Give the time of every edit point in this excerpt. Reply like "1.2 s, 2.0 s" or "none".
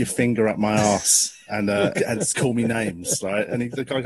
1.9 s